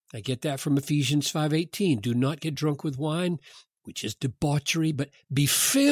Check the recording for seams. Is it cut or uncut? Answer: uncut